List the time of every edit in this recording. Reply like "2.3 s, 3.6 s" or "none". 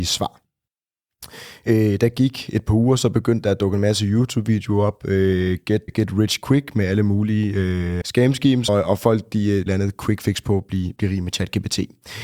5.9 s, 8.0 s, 8.7 s, 9.7 s